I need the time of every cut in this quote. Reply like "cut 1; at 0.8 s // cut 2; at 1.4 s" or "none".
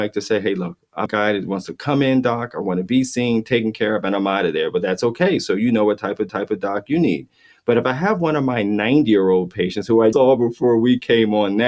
cut 1; at 1.1 s // cut 2; at 6.3 s // cut 3; at 10.1 s